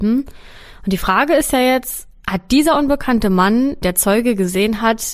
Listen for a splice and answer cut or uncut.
cut